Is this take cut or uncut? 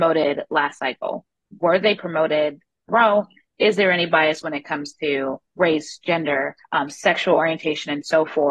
cut